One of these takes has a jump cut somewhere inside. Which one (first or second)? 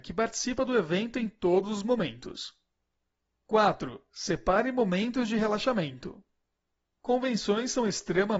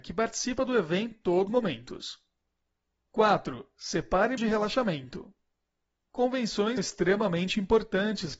second